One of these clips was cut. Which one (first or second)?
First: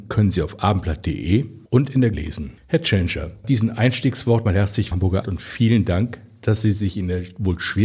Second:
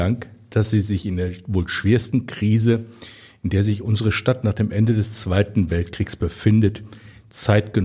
first